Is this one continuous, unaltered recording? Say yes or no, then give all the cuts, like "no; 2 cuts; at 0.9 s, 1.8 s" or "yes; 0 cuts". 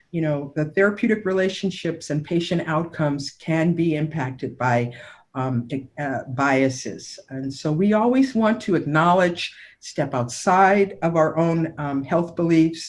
yes; 0 cuts